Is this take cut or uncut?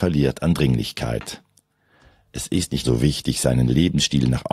cut